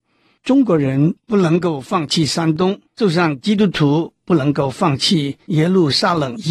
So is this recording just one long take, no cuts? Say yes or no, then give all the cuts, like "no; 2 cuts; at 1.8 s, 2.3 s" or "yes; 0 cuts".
no; 1 cut; at 2.9 s